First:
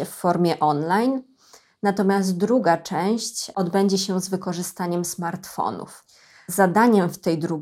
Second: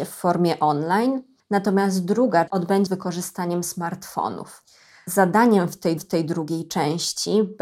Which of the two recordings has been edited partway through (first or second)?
second